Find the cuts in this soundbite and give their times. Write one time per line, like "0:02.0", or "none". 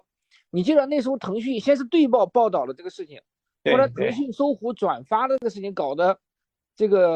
none